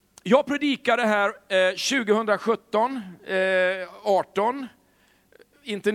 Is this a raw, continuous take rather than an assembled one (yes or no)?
yes